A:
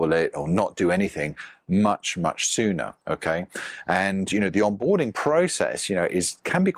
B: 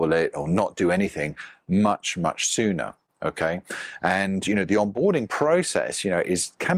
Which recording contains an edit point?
A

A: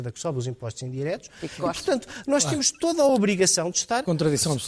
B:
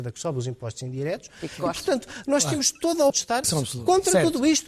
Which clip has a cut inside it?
B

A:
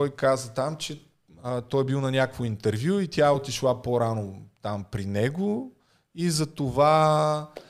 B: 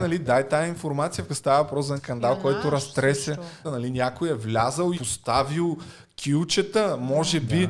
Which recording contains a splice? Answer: B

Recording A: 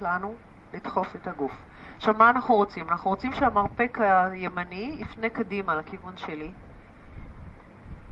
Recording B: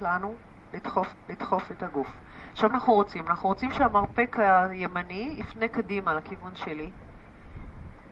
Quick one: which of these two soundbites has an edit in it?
B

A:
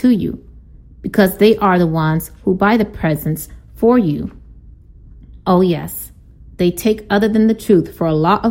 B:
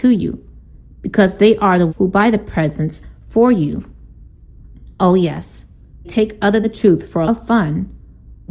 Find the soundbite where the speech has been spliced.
B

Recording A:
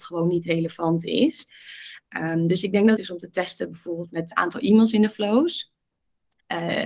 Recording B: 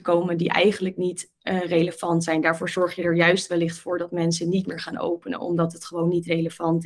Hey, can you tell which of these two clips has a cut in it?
A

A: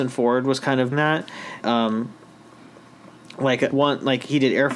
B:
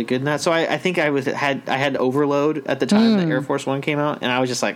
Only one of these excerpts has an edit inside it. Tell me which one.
A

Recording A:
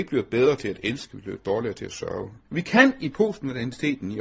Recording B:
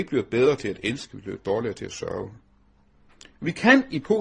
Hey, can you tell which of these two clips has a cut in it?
A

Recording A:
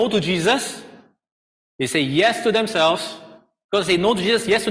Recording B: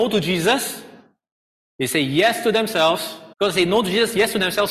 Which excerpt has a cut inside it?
B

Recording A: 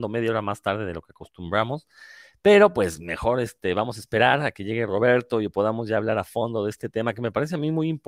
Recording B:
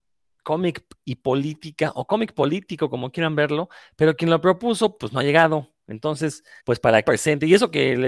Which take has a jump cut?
B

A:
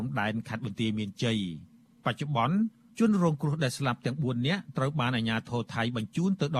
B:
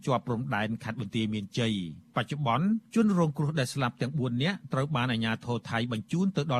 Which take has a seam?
B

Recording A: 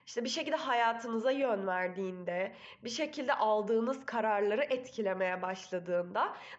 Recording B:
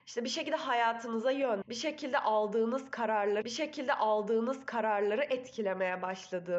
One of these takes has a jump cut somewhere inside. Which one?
B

